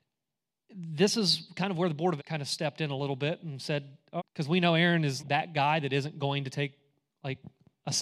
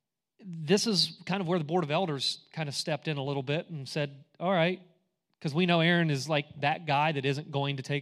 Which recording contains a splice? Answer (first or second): first